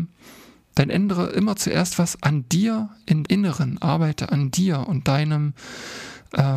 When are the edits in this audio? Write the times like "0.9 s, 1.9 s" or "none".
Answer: 3.2 s